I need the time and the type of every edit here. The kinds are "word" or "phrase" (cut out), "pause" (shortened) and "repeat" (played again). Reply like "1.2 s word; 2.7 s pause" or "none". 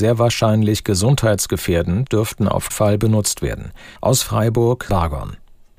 2.1 s word; 2.7 s word; 4.0 s pause; 4.9 s word

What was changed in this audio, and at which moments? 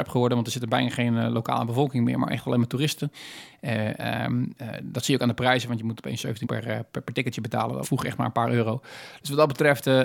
4.0 s word; 6.4 s word; 7.8 s word

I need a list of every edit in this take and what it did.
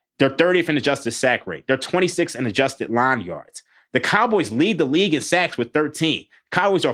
none

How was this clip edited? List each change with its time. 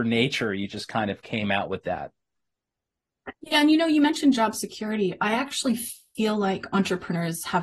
3.3 s pause

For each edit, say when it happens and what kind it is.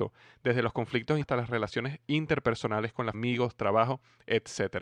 1.2 s word; 3.1 s word

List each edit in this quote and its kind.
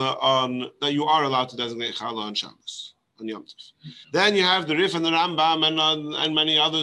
4.0 s pause

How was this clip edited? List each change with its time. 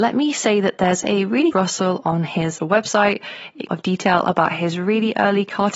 1.5 s phrase; 2.6 s word; 3.7 s phrase

